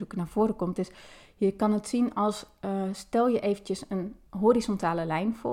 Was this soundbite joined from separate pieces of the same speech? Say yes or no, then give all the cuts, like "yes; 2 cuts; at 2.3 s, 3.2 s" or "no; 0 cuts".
no; 0 cuts